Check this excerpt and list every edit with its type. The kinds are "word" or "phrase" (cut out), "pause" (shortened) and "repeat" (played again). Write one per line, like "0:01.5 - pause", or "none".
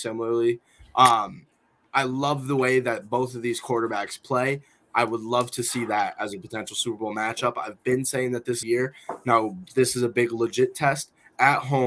0:08.6 - phrase